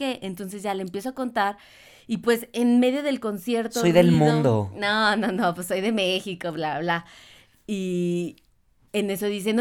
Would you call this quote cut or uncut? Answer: uncut